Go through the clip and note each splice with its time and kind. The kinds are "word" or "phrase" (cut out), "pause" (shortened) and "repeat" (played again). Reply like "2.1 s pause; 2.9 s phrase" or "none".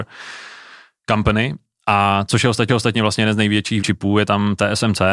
2.7 s repeat; 3.8 s word

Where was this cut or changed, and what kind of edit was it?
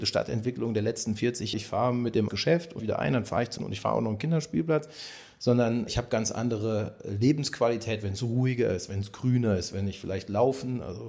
1.5 s word; 2.3 s phrase; 2.8 s phrase; 3.6 s word; 5.9 s word; 9.7 s phrase

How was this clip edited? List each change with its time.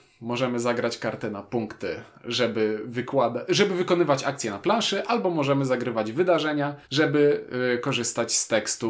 6.8 s pause

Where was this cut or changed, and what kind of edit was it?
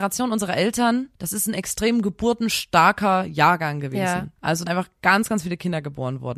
1.2 s pause; 4.4 s pause; 4.7 s word

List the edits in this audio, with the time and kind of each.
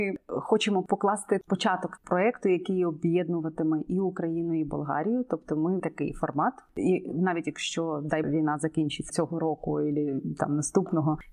2.0 s word; 5.8 s phrase; 8.2 s word; 9.1 s word

